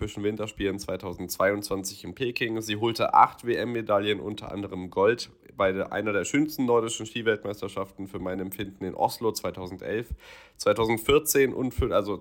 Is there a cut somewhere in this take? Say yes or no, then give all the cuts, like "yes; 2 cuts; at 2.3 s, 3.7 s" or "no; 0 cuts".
no; 0 cuts